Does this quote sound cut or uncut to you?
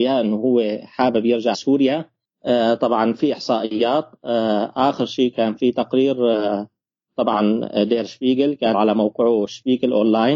cut